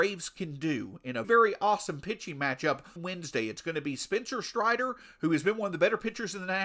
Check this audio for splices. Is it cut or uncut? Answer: cut